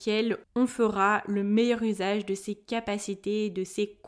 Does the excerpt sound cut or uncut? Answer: uncut